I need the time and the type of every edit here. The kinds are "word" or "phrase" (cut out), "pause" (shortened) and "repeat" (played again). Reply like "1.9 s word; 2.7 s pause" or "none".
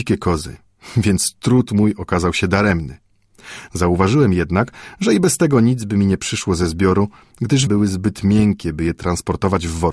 7.7 s word

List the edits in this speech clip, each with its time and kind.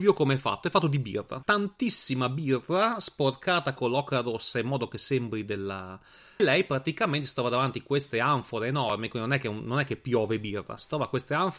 1.4 s word; 3.8 s word; 6.4 s phrase

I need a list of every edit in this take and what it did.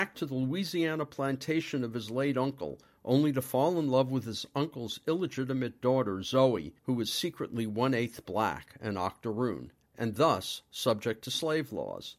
6.8 s pause

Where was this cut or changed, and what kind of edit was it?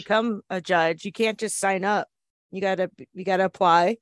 none

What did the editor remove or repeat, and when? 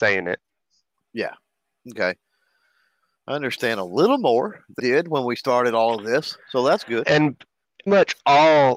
4.8 s word; 7.9 s word

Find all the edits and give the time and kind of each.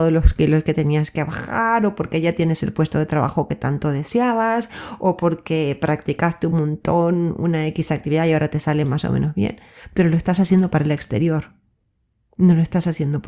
none

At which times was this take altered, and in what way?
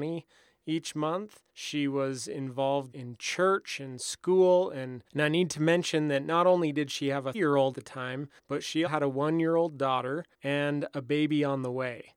1.5 s pause; 2.9 s word; 5.1 s pause; 7.3 s word; 7.7 s word; 8.4 s pause; 8.9 s word; 10.3 s pause

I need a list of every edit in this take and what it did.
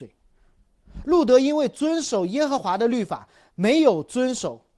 none

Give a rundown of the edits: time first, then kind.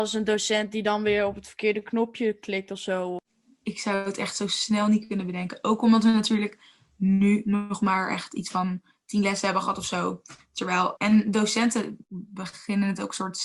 11.0 s word

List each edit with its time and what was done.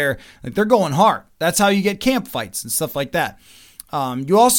none

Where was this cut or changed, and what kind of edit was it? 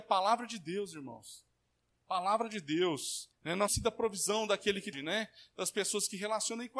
1.8 s pause; 3.3 s pause; 3.7 s word; 4.9 s phrase

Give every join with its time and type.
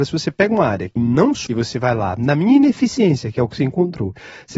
1.0 s word; 1.5 s word

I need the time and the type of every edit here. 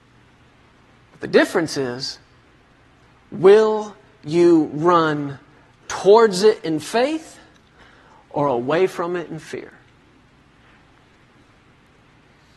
none

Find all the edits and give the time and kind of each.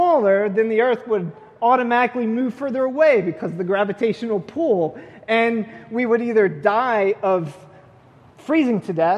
none

